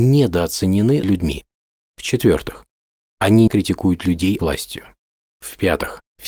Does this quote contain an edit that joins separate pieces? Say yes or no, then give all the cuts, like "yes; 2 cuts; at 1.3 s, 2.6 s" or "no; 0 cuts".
yes; 3 cuts; at 1.0 s, 3.5 s, 4.4 s